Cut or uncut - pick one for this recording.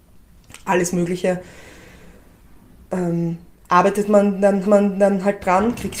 cut